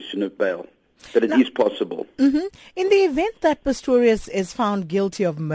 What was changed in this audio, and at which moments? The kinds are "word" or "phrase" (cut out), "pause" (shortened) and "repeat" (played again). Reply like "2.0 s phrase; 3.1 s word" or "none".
none